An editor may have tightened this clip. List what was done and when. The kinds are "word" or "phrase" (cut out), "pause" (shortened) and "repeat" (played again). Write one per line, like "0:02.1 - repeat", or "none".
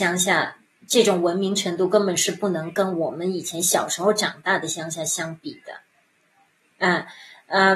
none